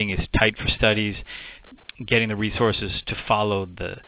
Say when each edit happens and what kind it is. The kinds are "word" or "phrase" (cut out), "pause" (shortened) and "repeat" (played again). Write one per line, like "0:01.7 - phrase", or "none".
none